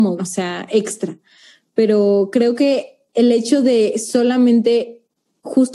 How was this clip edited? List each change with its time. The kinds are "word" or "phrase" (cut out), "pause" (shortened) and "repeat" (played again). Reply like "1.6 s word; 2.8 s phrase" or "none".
3.1 s pause